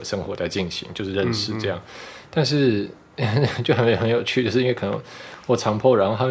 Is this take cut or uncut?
uncut